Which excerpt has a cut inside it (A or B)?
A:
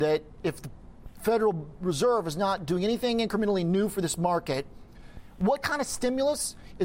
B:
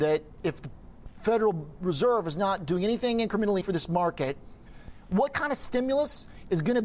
B